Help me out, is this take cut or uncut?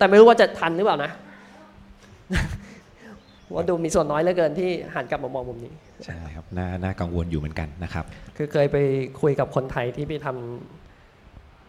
cut